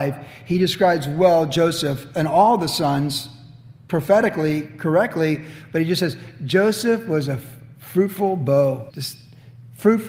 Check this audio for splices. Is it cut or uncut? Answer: cut